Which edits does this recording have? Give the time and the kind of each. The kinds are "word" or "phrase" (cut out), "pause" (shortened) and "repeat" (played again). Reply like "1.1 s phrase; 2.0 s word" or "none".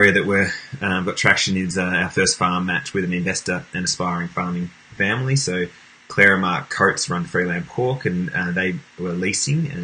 none